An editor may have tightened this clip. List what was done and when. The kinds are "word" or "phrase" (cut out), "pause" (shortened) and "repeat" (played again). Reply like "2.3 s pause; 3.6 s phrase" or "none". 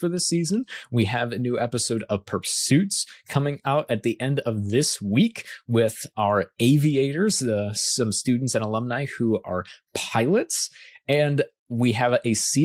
none